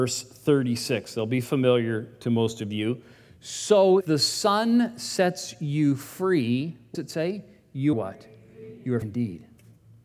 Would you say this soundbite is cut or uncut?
cut